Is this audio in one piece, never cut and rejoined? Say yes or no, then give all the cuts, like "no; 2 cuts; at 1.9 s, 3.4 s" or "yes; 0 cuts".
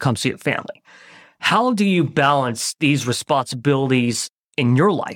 yes; 0 cuts